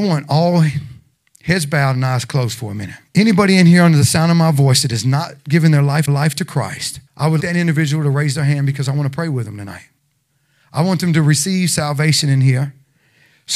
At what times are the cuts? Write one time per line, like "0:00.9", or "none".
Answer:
0:03.1
0:06.1
0:07.1
0:07.4